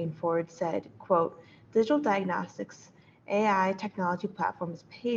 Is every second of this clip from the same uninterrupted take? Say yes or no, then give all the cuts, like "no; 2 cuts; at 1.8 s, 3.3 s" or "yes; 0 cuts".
yes; 0 cuts